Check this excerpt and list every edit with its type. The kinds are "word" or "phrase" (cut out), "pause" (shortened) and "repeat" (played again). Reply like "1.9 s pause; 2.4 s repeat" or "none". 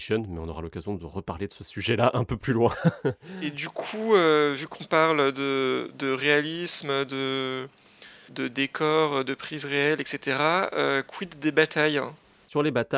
8.3 s word